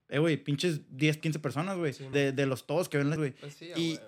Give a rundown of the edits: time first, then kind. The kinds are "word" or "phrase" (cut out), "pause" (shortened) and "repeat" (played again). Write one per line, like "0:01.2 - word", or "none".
0:01.2 - word
0:02.1 - word
0:03.2 - word